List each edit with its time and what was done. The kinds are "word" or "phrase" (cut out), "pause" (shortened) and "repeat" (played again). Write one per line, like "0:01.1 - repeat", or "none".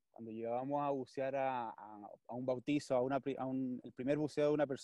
none